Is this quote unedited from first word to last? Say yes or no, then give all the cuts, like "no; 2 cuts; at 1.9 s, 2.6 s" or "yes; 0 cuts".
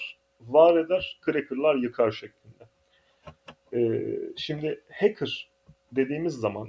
yes; 0 cuts